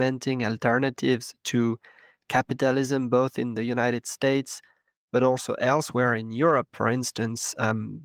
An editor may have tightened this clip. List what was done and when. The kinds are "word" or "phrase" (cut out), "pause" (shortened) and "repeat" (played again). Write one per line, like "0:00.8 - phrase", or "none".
none